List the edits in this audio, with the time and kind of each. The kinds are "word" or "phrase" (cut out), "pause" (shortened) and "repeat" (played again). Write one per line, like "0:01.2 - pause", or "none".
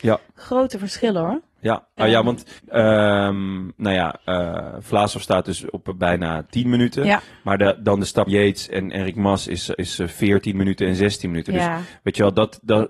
0:02.0 - word
0:02.6 - pause
0:08.3 - phrase